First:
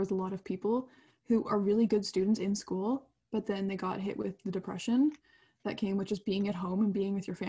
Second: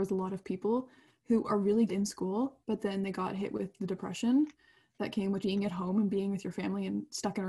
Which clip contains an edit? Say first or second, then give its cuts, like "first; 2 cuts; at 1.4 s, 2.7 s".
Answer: second; 3 cuts; at 1.9 s, 2.6 s, 5.4 s